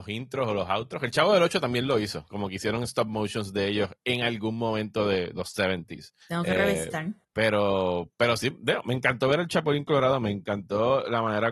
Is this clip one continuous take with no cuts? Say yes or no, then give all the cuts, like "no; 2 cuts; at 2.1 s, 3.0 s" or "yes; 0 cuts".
no; 2 cuts; at 6.2 s, 7.2 s